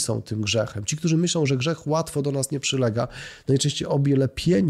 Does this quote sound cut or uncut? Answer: uncut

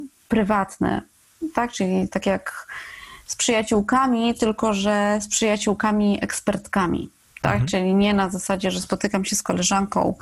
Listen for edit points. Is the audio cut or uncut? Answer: uncut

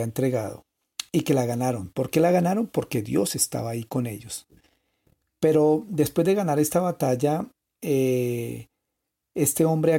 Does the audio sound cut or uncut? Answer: uncut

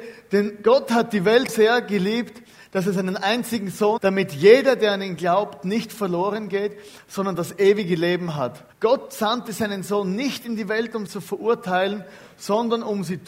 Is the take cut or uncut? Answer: cut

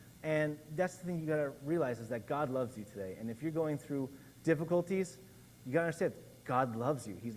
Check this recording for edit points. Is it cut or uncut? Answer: uncut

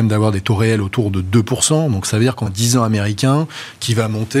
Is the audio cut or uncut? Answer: cut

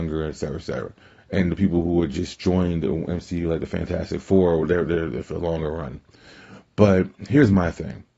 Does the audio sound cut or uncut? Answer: cut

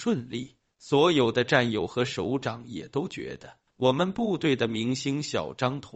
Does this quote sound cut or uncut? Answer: cut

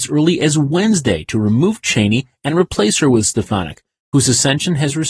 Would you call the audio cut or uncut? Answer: uncut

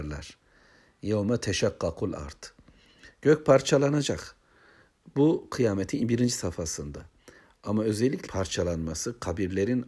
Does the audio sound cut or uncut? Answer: cut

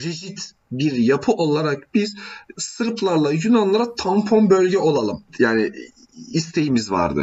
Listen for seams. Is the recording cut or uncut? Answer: cut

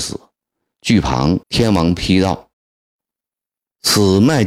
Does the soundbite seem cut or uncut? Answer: cut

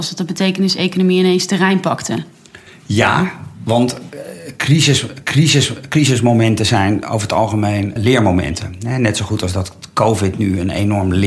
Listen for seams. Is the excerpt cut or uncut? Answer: cut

